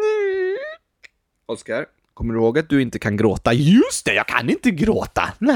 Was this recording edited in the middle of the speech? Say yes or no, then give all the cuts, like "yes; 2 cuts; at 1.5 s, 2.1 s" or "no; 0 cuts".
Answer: no; 0 cuts